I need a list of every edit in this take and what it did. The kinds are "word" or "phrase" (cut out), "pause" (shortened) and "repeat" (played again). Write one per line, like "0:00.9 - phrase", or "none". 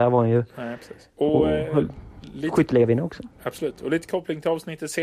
0:01.1 - pause